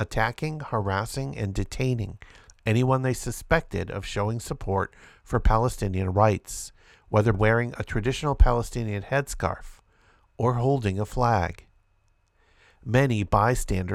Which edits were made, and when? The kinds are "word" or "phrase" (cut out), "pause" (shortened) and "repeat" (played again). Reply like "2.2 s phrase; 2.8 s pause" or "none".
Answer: 7.3 s word